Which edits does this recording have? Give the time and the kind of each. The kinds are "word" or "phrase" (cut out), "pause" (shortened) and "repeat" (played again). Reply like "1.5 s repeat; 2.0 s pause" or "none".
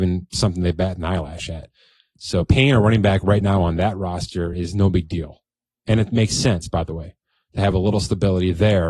none